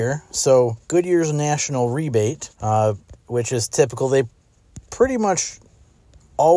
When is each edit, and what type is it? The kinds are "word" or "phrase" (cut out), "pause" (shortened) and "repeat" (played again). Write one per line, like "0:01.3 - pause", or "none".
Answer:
0:02.5 - pause